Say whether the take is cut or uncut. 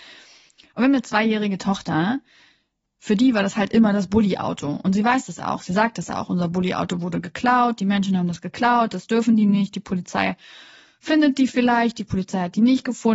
uncut